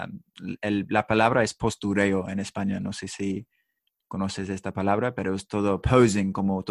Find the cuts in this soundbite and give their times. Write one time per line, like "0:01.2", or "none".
none